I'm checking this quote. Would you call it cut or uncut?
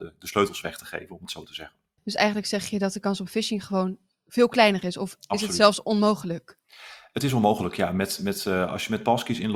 uncut